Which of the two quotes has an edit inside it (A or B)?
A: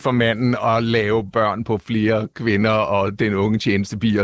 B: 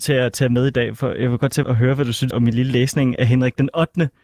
B